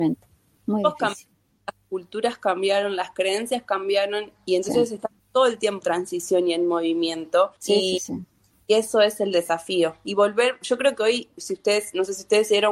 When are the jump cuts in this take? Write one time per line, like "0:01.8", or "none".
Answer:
0:05.2
0:05.8
0:07.6